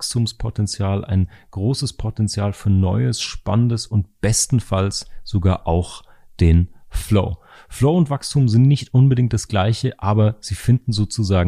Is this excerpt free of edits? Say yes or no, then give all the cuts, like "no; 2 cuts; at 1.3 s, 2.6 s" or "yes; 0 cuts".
yes; 0 cuts